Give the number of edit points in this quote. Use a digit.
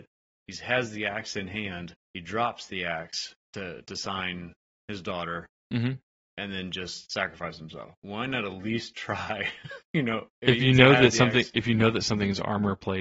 3